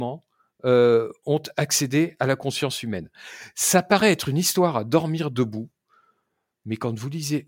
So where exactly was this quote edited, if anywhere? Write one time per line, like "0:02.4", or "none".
none